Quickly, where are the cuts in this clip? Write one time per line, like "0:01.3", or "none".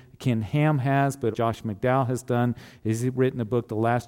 0:01.3